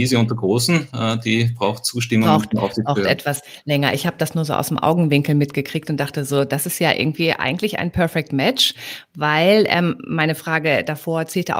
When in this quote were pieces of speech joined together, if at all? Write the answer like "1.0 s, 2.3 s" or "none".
none